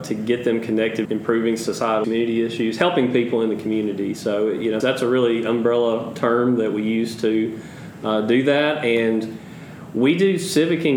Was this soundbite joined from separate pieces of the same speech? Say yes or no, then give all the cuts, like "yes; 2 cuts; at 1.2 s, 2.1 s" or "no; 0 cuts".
yes; 3 cuts; at 1.0 s, 2.0 s, 4.8 s